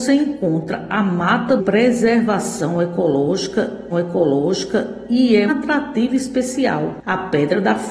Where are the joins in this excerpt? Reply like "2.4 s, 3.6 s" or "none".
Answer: 1.6 s, 3.9 s, 5.5 s